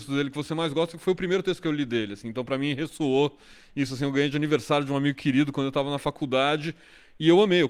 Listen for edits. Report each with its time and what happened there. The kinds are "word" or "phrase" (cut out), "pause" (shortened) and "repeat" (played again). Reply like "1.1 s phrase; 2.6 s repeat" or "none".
none